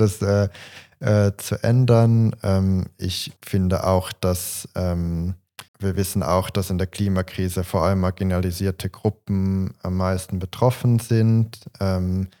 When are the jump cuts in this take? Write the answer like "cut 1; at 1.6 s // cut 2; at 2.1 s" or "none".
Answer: cut 1; at 3.4 s // cut 2; at 5.7 s